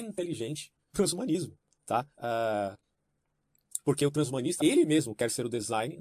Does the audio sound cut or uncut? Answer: cut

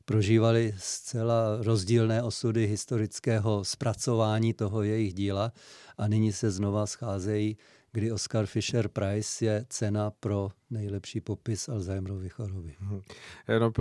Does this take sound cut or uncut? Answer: uncut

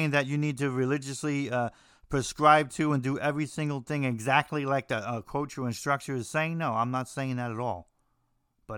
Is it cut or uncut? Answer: uncut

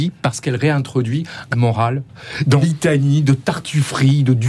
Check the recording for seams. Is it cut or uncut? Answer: cut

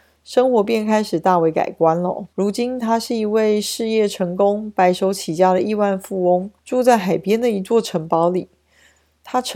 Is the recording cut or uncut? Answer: cut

